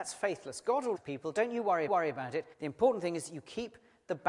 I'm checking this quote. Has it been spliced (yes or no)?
yes